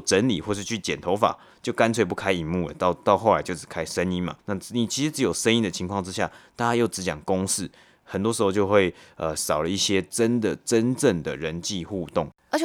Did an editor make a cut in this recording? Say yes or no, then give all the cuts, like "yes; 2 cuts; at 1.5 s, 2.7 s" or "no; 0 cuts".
yes; 1 cut; at 4.4 s